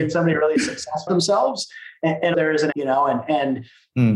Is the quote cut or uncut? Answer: cut